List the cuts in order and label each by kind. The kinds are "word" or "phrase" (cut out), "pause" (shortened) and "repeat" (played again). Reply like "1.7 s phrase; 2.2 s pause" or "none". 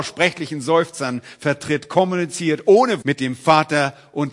3.0 s word